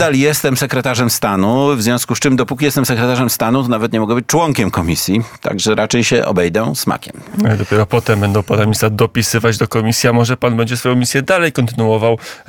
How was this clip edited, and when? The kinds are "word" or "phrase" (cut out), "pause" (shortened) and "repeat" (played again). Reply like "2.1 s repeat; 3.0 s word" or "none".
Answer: none